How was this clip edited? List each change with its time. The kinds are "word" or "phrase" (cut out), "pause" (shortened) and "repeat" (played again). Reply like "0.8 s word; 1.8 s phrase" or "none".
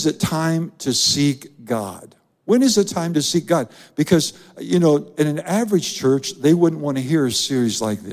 none